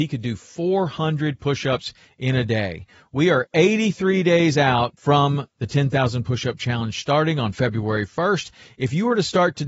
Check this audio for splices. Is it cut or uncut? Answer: uncut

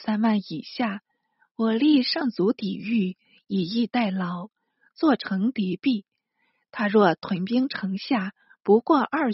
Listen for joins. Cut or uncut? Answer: uncut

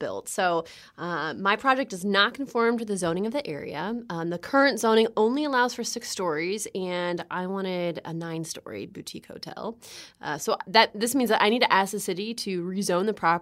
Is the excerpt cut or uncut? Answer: uncut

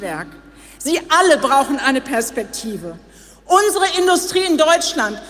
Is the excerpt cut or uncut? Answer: uncut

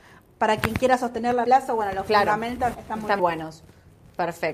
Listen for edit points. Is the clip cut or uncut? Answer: cut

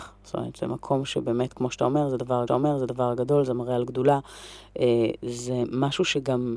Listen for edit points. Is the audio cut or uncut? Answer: cut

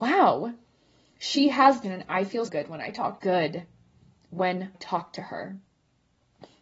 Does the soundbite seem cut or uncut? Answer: cut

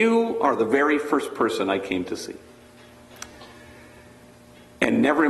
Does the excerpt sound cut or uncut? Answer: uncut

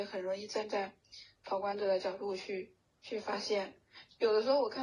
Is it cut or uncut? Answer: uncut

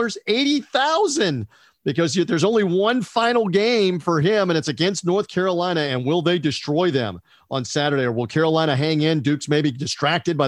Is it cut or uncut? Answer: uncut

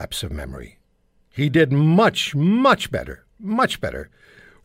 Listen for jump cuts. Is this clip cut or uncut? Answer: cut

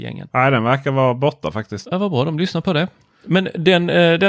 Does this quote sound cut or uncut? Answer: uncut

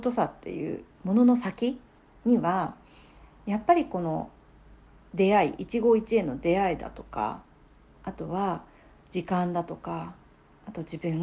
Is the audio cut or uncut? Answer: uncut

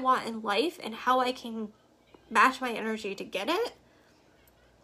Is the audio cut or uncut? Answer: uncut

